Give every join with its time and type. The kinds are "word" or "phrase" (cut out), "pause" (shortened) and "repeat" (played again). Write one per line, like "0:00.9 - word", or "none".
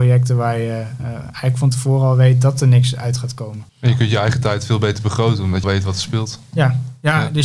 0:03.7 - pause
0:05.6 - phrase